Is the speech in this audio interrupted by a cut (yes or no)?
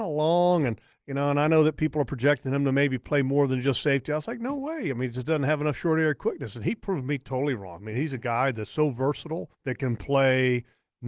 yes